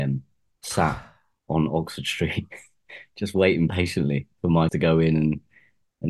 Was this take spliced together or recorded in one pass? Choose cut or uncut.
cut